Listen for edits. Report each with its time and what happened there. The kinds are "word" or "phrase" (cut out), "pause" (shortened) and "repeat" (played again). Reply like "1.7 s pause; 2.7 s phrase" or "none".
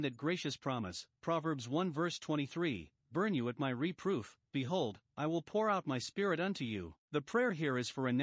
4.5 s pause; 7.0 s pause